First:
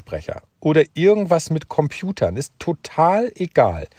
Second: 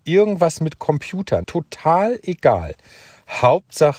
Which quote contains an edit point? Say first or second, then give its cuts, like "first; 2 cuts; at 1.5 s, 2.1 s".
second; 1 cut; at 1.4 s